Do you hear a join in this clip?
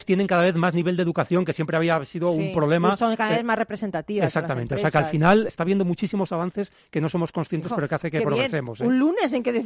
yes; 1 cut; at 5.5 s

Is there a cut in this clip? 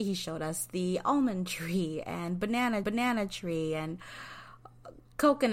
yes; 1 cut; at 2.8 s

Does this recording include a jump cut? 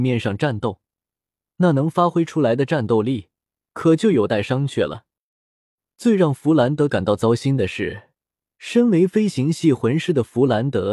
no; 0 cuts

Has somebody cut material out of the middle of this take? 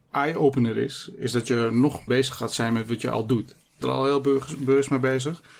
yes; 2 cuts; at 2.1 s, 3.8 s

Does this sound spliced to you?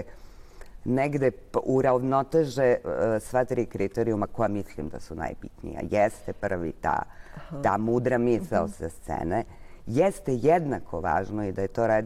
no; 0 cuts

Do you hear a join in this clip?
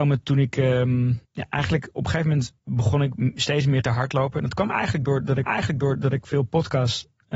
yes; 3 cuts; at 1.2 s, 2.6 s, 5.5 s

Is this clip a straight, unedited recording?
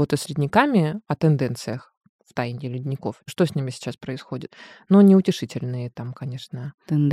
yes; 0 cuts

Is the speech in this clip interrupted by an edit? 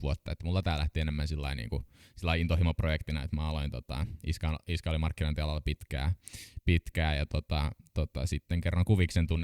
no; 0 cuts

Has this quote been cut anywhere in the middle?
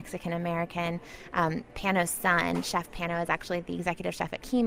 no; 0 cuts

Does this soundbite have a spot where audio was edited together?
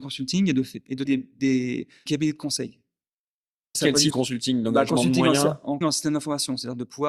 yes; 5 cuts; at 1.0 s, 2.1 s, 3.7 s, 4.1 s, 5.8 s

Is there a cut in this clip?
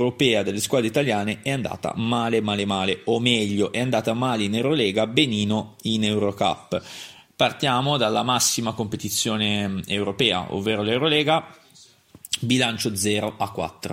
no; 0 cuts

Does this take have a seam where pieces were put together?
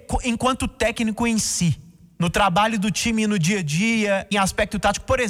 yes; 1 cut; at 4.3 s

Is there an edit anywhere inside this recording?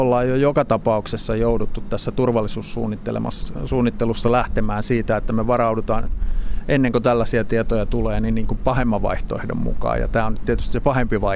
no; 0 cuts

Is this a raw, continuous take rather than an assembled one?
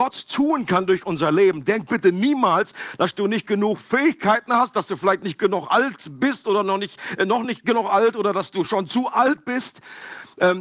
yes; 0 cuts

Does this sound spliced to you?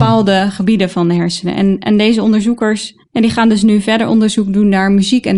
yes; 1 cut; at 3.0 s

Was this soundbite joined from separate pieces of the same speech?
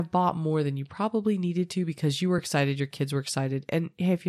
no; 0 cuts

